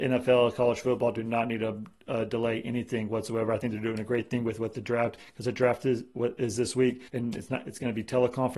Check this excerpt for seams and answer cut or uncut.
cut